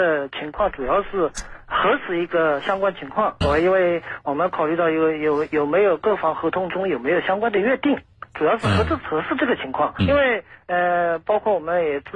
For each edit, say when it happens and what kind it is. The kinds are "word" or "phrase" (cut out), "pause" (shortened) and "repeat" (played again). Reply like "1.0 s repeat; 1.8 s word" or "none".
3.4 s word; 10.0 s word